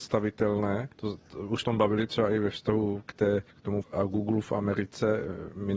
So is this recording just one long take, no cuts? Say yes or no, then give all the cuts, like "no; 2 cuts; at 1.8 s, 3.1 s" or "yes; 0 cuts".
no; 5 cuts; at 0.9 s, 1.6 s, 2.1 s, 3.5 s, 3.8 s